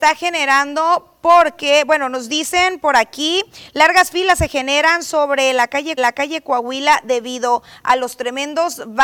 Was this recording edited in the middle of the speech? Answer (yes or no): yes